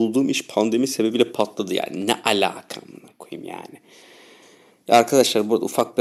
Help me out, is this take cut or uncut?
uncut